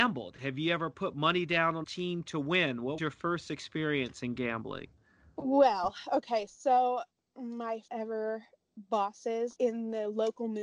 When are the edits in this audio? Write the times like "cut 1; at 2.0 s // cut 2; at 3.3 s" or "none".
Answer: cut 1; at 1.8 s // cut 2; at 3.0 s // cut 3; at 7.9 s // cut 4; at 9.6 s